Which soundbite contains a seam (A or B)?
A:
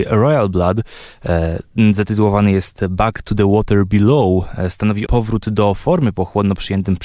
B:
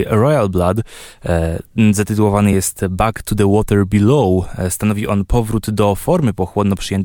A